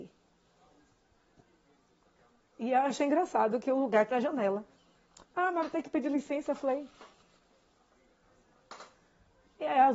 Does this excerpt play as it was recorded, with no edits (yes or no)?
no